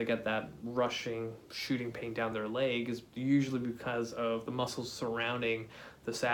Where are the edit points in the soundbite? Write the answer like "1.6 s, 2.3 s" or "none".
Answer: none